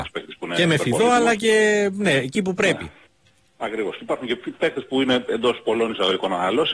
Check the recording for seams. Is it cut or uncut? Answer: uncut